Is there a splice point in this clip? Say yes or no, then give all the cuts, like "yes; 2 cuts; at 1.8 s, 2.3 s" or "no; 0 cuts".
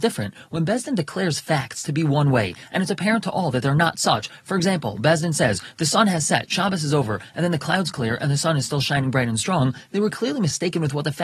no; 0 cuts